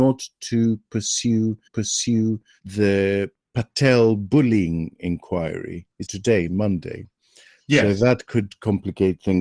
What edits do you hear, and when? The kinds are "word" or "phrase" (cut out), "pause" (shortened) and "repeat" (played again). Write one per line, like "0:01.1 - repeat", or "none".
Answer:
0:01.7 - repeat
0:06.1 - word